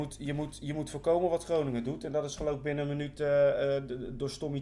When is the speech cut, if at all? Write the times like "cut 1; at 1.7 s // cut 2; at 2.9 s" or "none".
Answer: none